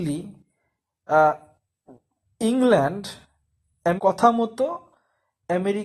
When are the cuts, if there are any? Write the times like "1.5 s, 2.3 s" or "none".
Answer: 4.0 s